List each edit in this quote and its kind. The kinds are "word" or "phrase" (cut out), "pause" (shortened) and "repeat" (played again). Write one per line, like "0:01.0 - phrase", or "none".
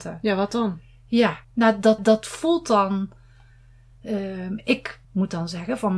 0:01.4 - pause
0:02.0 - repeat
0:05.0 - pause